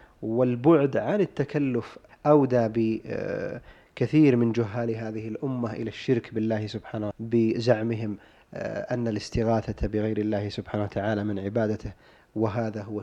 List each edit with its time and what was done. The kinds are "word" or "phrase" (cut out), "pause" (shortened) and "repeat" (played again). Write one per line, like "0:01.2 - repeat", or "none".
0:02.1 - word
0:07.1 - word